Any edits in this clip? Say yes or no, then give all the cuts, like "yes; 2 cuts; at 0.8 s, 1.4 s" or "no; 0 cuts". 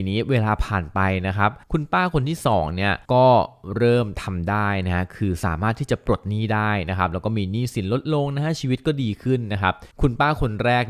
yes; 3 cuts; at 1.6 s, 3.0 s, 9.9 s